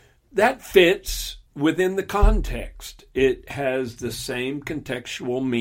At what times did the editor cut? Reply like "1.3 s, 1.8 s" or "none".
1.5 s